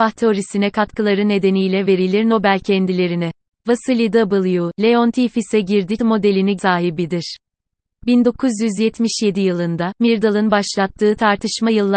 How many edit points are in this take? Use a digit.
2